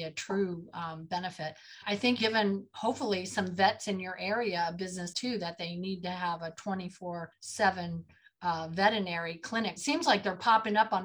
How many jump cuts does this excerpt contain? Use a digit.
5